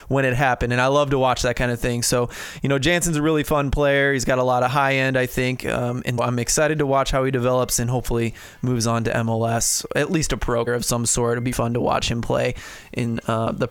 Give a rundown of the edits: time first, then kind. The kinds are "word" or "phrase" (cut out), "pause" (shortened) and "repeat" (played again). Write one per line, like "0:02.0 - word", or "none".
0:06.2 - word
0:10.7 - word
0:11.5 - word